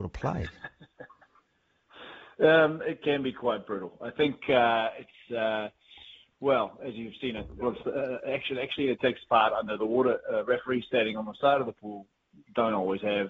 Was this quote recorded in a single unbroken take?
no; 2 cuts; at 3.0 s, 7.6 s

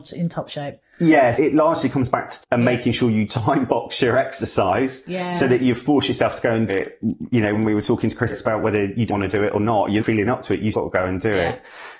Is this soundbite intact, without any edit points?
no; 8 cuts; at 1.4 s, 2.4 s, 6.7 s, 7.6 s, 8.3 s, 9.1 s, 10.0 s, 10.7 s

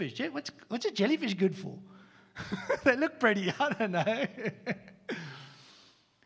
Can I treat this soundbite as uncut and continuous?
yes; 0 cuts

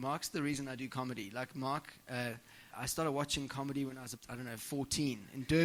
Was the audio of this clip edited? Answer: yes; 2 cuts; at 2.7 s, 4.2 s

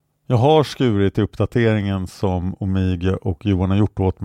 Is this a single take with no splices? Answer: yes; 0 cuts

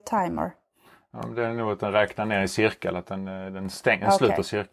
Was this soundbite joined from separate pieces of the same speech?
no; 0 cuts

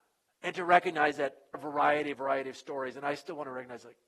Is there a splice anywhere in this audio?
yes; 2 cuts; at 1.5 s, 2.1 s

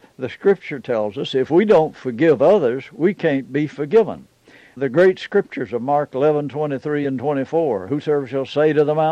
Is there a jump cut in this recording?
no; 0 cuts

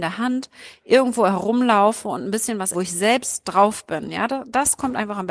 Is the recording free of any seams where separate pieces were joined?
no; 1 cut; at 2.7 s

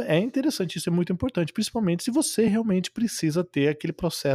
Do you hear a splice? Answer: no; 0 cuts

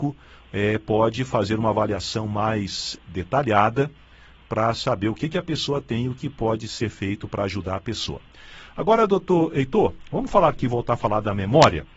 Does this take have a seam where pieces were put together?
no; 0 cuts

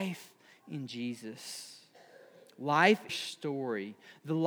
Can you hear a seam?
yes; 1 cut; at 3.1 s

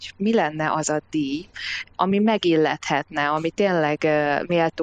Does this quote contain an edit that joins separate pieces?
no; 0 cuts

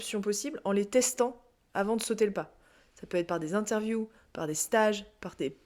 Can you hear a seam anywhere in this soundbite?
no; 0 cuts

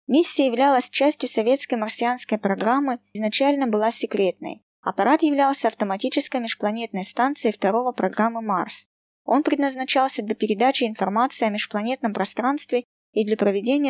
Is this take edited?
yes; 3 cuts; at 3.1 s, 4.7 s, 7.9 s

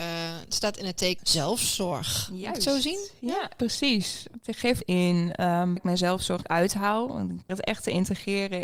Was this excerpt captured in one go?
no; 6 cuts; at 1.2 s, 3.6 s, 4.8 s, 5.8 s, 6.4 s, 7.5 s

